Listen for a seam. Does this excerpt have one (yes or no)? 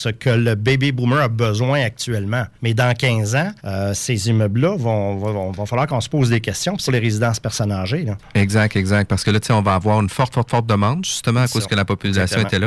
yes